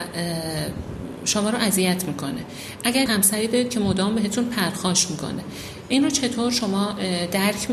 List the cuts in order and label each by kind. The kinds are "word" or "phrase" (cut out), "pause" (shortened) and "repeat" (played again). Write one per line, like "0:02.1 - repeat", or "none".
0:03.1 - word